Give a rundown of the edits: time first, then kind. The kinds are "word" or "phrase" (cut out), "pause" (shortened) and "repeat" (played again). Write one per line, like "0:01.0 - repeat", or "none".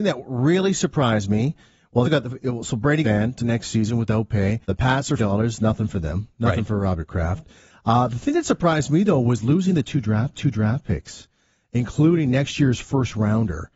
0:02.0 - word
0:03.0 - phrase
0:03.4 - word
0:04.6 - pause
0:05.2 - phrase
0:10.3 - repeat